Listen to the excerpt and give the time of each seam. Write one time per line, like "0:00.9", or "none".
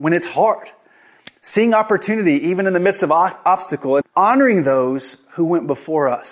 0:04.0